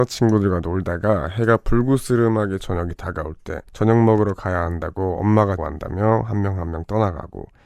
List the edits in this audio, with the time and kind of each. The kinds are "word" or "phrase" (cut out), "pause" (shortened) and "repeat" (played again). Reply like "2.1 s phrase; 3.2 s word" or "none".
2.6 s word; 3.7 s pause; 5.6 s word